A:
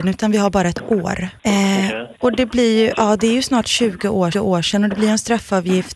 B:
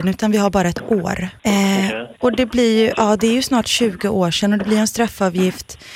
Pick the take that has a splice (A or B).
A